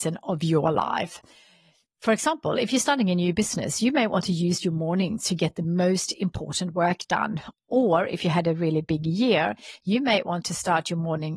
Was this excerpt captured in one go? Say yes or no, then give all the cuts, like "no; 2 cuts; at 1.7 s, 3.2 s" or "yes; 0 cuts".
yes; 0 cuts